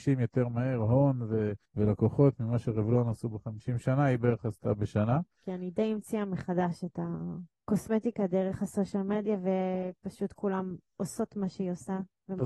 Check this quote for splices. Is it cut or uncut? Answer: cut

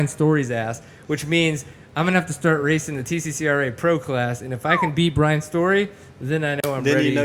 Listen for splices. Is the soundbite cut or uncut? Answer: uncut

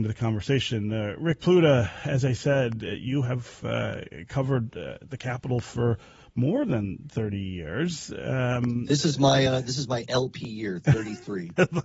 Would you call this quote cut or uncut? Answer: uncut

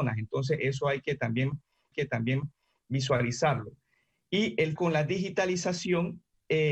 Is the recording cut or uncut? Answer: cut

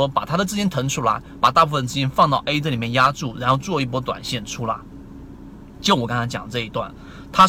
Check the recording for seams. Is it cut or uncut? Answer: uncut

